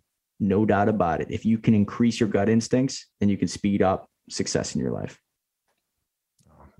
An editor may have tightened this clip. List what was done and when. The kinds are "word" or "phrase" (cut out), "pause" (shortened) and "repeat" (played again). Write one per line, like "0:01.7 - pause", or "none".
0:03.1 - pause
0:04.2 - pause